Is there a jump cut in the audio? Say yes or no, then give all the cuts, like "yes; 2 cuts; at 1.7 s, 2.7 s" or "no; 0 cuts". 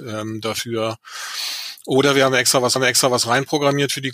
yes; 1 cut; at 2.8 s